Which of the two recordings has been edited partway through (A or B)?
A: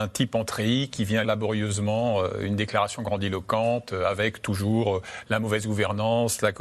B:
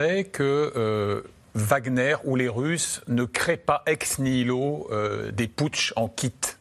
A